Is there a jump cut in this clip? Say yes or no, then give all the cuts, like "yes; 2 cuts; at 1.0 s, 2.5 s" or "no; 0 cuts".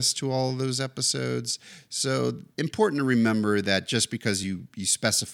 no; 0 cuts